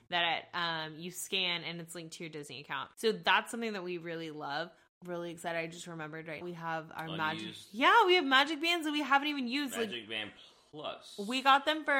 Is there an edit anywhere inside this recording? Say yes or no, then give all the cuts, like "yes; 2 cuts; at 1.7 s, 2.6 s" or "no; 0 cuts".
yes; 3 cuts; at 2.9 s, 5.0 s, 6.4 s